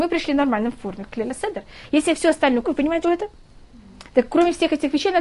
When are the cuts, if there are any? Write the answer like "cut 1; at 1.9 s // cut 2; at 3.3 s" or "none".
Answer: cut 1; at 2.6 s // cut 2; at 3.0 s